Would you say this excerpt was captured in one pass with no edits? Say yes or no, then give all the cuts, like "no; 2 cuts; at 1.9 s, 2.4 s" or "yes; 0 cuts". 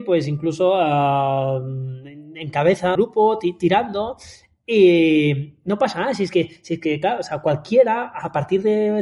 no; 1 cut; at 3.0 s